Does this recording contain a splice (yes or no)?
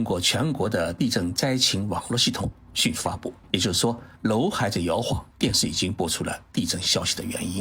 yes